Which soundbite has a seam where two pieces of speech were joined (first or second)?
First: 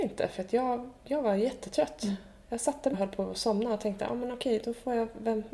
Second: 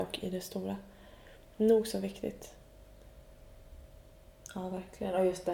first